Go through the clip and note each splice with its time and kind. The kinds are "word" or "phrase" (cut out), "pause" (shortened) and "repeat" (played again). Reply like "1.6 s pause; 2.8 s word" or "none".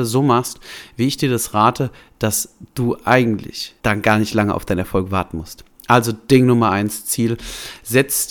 3.8 s pause

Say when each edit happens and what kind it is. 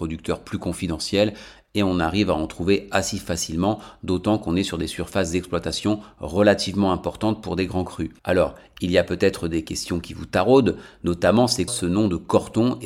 8.2 s pause; 11.7 s word

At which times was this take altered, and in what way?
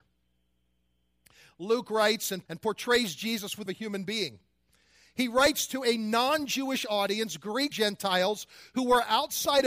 2.5 s word; 3.7 s phrase; 7.7 s word

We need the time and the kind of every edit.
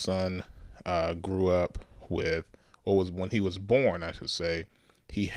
none

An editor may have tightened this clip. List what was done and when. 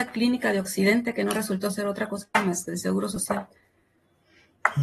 none

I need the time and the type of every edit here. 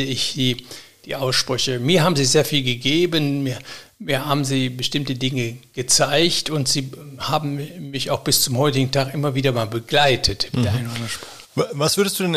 11.5 s pause

